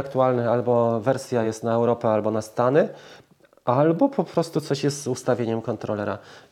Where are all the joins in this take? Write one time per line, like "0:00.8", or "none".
none